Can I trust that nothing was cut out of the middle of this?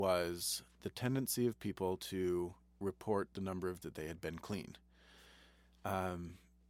no; 1 cut; at 3.8 s

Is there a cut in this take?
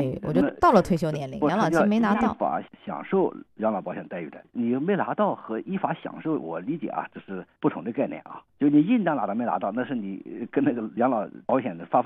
yes; 1 cut; at 11.0 s

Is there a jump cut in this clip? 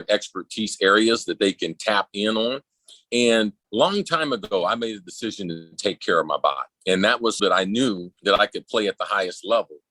yes; 4 cuts; at 3.6 s, 6.8 s, 7.4 s, 8.2 s

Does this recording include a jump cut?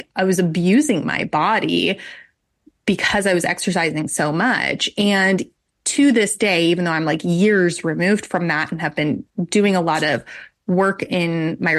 no; 0 cuts

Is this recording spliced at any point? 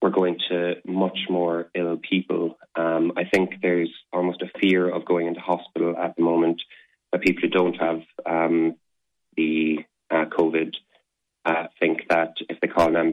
no; 0 cuts

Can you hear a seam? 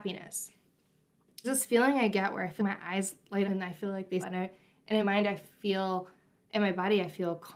yes; 5 cuts; at 1.4 s, 2.6 s, 3.5 s, 4.2 s, 5.0 s

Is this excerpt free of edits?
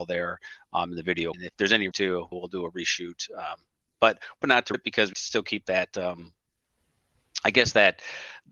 no; 6 cuts; at 1.3 s, 1.9 s, 2.3 s, 4.4 s, 4.7 s, 5.1 s

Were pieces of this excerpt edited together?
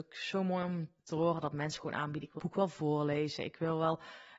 yes; 2 cuts; at 1.0 s, 2.4 s

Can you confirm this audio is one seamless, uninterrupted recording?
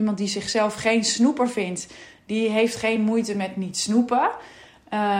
yes; 0 cuts

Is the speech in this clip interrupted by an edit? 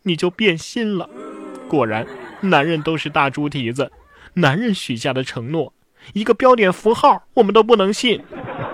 no; 0 cuts

